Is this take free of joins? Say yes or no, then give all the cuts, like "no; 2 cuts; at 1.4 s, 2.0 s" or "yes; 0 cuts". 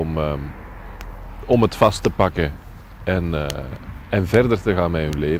yes; 0 cuts